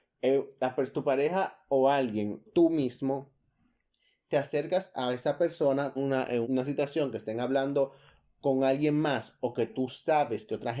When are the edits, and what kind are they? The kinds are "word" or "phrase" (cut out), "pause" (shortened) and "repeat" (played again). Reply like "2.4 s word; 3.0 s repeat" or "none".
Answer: 2.5 s word; 6.0 s word; 6.4 s word